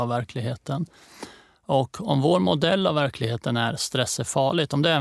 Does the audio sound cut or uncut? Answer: uncut